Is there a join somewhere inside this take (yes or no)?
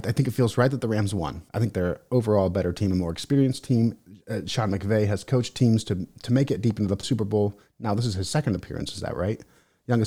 yes